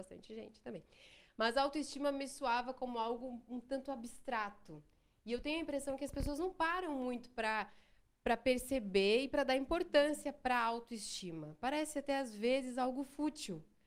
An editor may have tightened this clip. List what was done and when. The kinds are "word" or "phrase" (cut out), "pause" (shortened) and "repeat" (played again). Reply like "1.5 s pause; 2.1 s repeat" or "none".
none